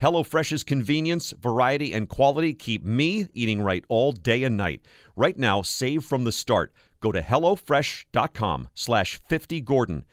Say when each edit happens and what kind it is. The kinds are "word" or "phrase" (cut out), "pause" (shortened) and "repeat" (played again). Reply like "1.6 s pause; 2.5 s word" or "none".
none